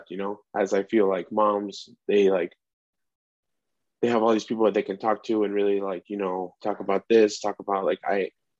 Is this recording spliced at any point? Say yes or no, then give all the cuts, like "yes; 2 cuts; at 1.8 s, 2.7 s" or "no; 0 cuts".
no; 0 cuts